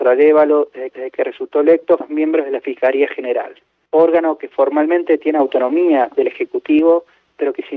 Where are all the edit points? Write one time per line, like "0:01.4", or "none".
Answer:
0:00.9
0:02.0